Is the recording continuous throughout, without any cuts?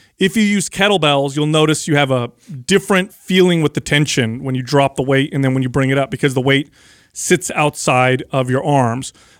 yes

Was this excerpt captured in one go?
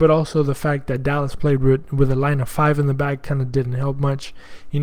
yes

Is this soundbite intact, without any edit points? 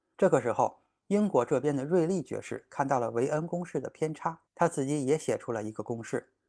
no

